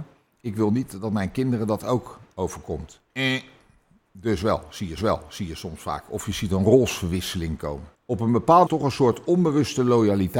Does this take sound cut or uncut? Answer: cut